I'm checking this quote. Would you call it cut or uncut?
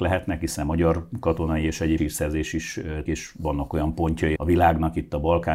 cut